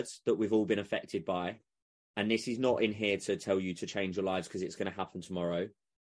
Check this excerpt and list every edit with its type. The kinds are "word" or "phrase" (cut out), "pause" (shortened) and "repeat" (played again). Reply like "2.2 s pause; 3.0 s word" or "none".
none